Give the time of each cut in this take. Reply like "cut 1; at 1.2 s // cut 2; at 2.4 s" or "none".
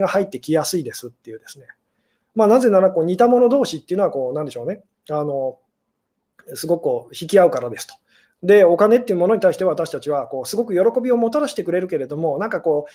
none